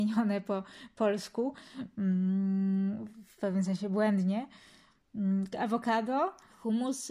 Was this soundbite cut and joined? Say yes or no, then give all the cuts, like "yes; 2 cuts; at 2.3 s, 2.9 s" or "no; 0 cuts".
no; 0 cuts